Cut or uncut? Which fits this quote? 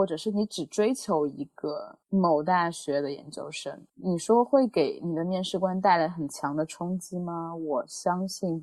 cut